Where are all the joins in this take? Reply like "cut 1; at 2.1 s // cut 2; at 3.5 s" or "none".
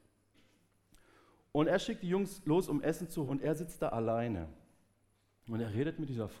cut 1; at 3.3 s